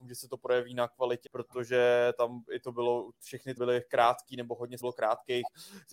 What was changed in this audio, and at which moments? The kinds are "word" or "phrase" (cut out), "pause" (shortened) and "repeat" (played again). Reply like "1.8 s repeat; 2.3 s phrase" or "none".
1.2 s word; 3.6 s word; 4.8 s word